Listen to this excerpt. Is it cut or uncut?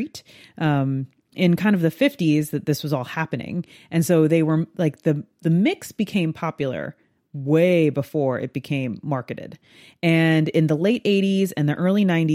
uncut